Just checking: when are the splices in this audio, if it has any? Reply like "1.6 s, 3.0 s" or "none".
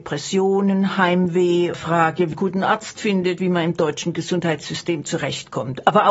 1.7 s, 2.3 s, 3.4 s